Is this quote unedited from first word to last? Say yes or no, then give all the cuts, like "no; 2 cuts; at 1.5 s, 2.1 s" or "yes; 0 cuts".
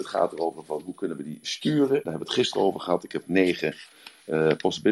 no; 1 cut; at 2.1 s